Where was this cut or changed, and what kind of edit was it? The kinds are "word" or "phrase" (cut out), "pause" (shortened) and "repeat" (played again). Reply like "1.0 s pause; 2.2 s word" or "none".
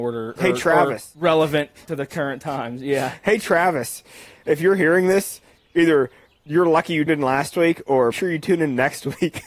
7.1 s word; 8.1 s word

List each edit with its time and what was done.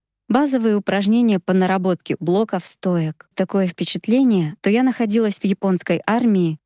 2.2 s word; 3.3 s phrase; 4.6 s word

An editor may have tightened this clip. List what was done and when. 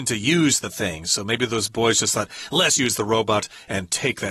2.8 s word

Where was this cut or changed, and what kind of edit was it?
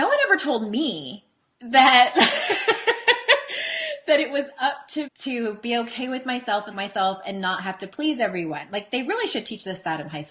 5.1 s word; 6.7 s word

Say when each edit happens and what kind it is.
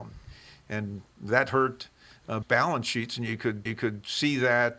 1.1 s pause; 2.4 s word; 3.7 s repeat

